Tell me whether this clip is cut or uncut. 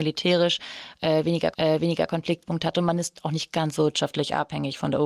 cut